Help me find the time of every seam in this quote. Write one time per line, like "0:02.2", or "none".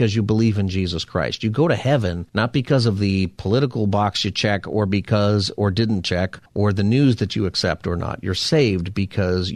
0:02.3
0:06.5